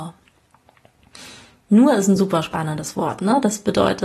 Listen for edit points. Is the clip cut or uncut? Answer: uncut